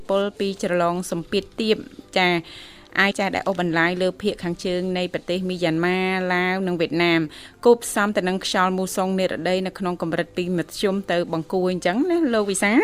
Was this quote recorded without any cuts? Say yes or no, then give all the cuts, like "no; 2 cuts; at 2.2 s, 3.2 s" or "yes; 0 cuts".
no; 1 cut; at 3.1 s